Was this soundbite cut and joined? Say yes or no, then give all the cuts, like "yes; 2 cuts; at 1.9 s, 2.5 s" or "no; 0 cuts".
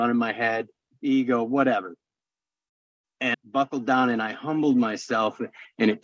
yes; 1 cut; at 3.3 s